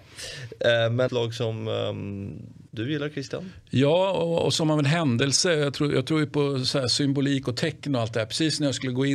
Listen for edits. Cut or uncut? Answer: cut